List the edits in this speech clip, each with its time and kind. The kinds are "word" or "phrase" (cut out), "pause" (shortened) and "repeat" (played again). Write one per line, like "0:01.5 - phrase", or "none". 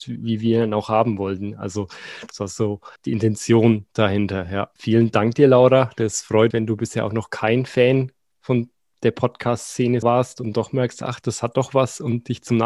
0:03.0 - pause
0:04.8 - word
0:06.5 - word
0:10.0 - word